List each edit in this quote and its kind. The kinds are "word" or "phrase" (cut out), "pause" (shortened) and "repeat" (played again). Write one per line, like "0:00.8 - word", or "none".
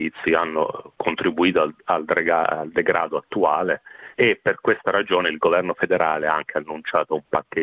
0:04.1 - pause